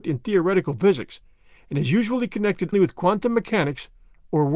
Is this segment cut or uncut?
cut